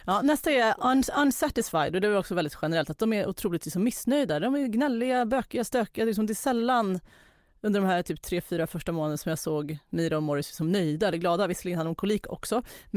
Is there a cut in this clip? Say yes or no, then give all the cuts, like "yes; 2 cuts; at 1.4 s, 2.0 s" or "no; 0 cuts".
no; 0 cuts